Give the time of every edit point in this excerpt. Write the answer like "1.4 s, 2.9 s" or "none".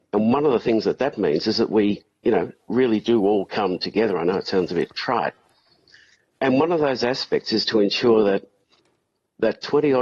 none

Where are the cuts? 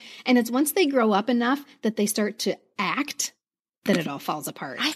none

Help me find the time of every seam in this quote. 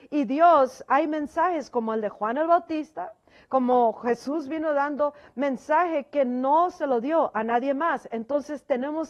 none

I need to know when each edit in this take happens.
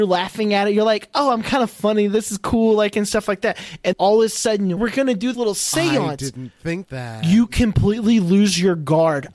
3.9 s, 4.8 s, 5.3 s, 6.8 s

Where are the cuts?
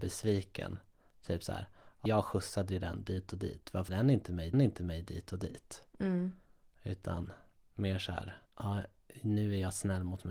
2.1 s, 3.9 s, 4.5 s, 7.6 s, 8.5 s

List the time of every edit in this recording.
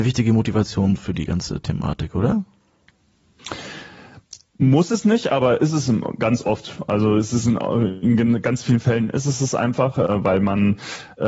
none

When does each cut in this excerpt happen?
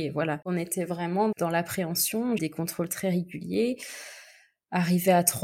1.3 s, 2.4 s, 2.9 s

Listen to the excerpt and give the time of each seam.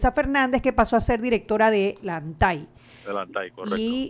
none

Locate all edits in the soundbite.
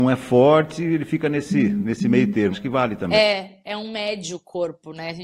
2.5 s, 3.6 s

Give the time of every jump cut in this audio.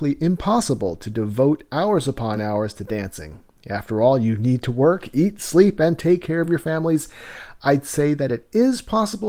none

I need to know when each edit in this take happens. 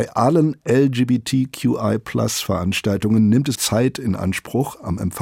3.5 s

